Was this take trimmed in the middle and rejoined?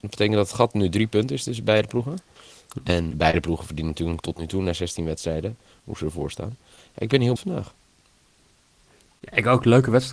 yes; 3 cuts; at 3.1 s, 4.2 s, 7.4 s

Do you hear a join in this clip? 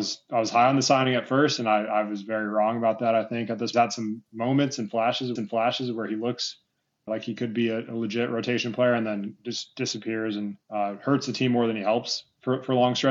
yes; 4 cuts; at 3.7 s, 5.4 s, 7.1 s, 10.6 s

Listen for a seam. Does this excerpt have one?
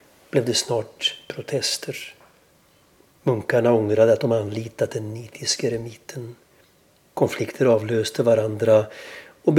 no; 0 cuts

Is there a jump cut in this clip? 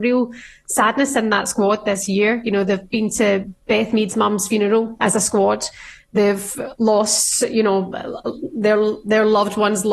no; 0 cuts

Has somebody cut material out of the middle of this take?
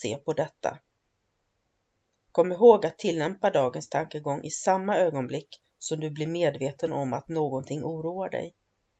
no; 0 cuts

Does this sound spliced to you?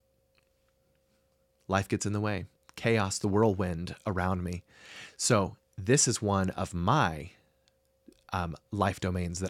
yes; 2 cuts; at 2.6 s, 5.6 s

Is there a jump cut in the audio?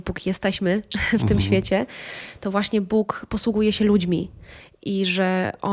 no; 0 cuts

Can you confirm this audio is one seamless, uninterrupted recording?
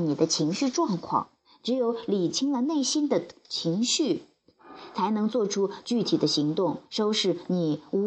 no; 2 cuts; at 1.4 s, 6.8 s

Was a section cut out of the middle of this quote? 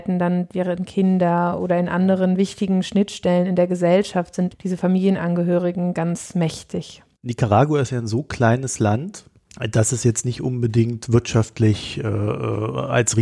no; 0 cuts

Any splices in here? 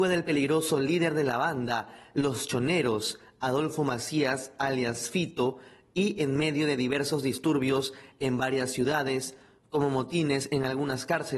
no; 0 cuts

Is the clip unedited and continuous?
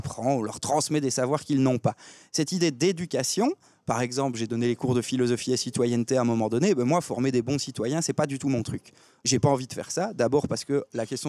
yes; 0 cuts

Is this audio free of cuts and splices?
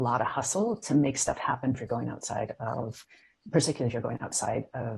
no; 1 cut; at 1.7 s

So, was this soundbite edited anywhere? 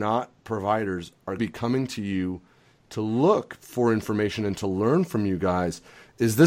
yes; 1 cut; at 1.4 s

